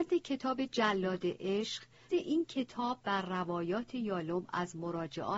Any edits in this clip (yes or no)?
yes